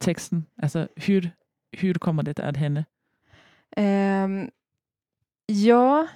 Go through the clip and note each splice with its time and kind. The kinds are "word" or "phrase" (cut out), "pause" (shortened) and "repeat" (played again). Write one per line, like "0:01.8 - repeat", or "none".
none